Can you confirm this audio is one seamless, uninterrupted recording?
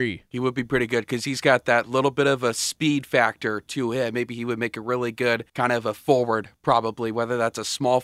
no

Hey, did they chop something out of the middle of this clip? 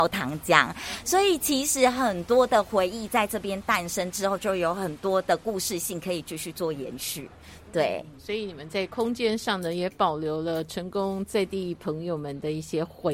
yes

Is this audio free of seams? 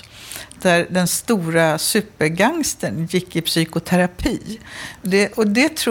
yes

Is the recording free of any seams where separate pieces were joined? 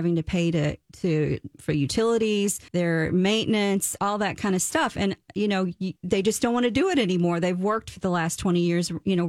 no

